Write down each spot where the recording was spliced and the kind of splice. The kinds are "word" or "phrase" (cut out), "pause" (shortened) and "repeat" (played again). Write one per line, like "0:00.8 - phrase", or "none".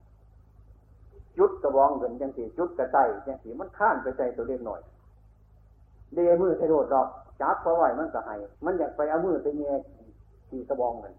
0:01.3 - pause
0:08.5 - pause